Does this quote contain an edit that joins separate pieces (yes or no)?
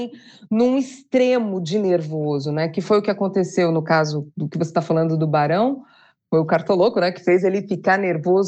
no